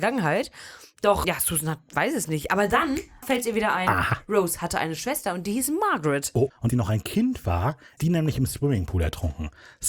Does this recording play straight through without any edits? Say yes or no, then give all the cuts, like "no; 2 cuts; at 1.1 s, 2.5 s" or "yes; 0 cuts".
no; 4 cuts; at 1.2 s, 3.2 s, 6.7 s, 8.0 s